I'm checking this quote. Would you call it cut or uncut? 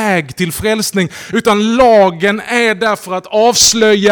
uncut